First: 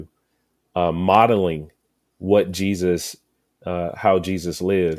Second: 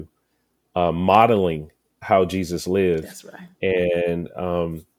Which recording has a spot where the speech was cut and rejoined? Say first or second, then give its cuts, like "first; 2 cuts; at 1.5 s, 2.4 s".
second; 2 cuts; at 2.0 s, 3.5 s